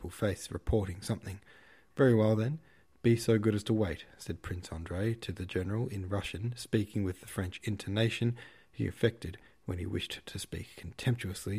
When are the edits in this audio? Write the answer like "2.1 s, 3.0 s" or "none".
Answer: none